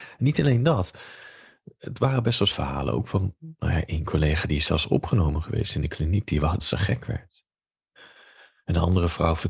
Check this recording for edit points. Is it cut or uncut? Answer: cut